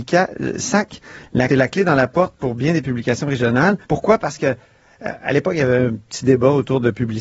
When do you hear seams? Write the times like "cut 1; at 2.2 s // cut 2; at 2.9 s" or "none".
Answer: cut 1; at 1.5 s // cut 2; at 3.8 s